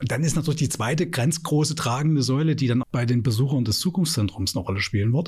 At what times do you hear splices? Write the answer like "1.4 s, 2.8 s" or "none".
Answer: 2.8 s